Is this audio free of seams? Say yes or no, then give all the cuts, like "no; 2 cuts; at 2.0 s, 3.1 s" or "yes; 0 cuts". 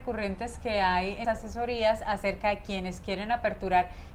no; 1 cut; at 1.2 s